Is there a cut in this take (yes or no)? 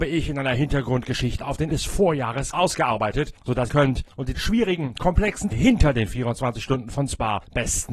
yes